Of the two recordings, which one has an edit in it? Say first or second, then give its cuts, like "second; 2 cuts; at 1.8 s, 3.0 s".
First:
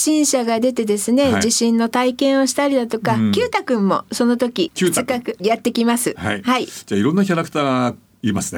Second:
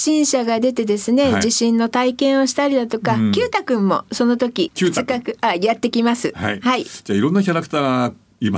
first; 1 cut; at 5.4 s